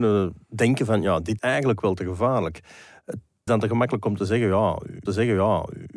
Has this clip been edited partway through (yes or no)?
yes